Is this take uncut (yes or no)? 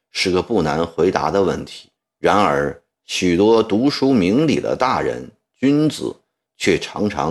no